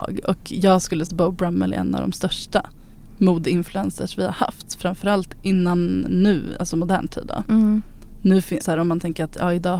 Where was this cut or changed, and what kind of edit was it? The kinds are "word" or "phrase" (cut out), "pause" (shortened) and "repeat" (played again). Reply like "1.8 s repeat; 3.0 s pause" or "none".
1.1 s word; 5.3 s word; 8.6 s word